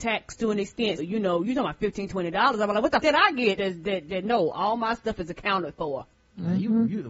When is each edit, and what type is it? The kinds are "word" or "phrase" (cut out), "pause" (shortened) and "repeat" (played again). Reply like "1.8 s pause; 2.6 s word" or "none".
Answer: 1.0 s word; 3.0 s word; 3.6 s word